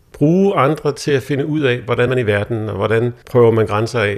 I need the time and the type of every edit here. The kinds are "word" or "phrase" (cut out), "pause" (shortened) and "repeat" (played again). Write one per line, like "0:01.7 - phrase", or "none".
0:02.1 - word
0:03.2 - pause